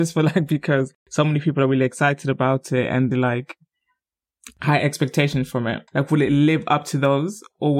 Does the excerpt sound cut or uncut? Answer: cut